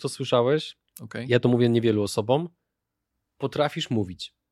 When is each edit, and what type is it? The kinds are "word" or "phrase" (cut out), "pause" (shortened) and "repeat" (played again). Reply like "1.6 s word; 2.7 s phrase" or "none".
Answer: none